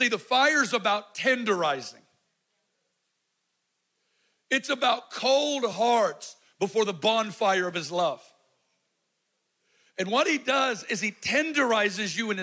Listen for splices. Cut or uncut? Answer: uncut